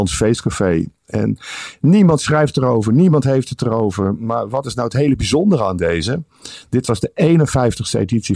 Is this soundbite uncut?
yes; 0 cuts

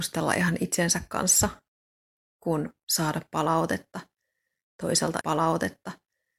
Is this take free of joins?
no; 1 cut; at 5.2 s

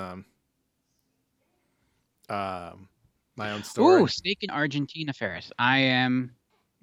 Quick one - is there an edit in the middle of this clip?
yes; 1 cut; at 4.5 s

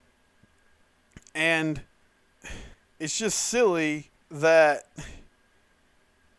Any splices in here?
yes; 2 cuts; at 2.7 s, 4.2 s

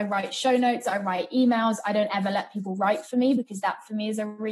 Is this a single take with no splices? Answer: yes; 0 cuts

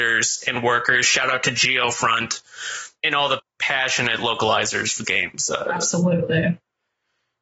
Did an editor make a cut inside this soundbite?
yes; 3 cuts; at 3.0 s, 3.4 s, 5.0 s

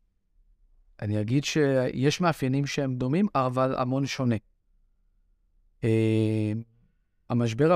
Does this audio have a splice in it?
no; 0 cuts

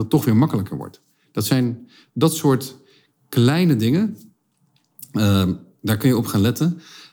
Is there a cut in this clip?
no; 0 cuts

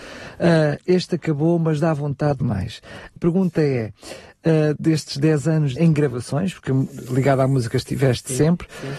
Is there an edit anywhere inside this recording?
yes; 4 cuts; at 2.4 s, 3.2 s, 4.8 s, 5.8 s

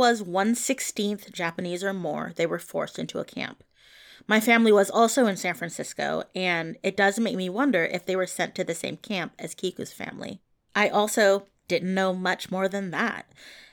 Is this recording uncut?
yes; 0 cuts

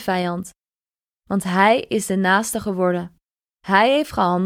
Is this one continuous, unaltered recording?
yes; 0 cuts

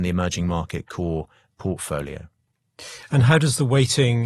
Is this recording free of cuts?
yes; 0 cuts

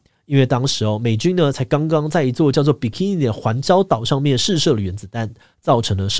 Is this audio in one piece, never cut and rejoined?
yes; 0 cuts

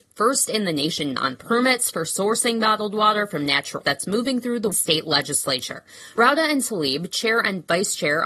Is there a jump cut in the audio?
yes; 3 cuts; at 1.2 s, 3.8 s, 4.7 s

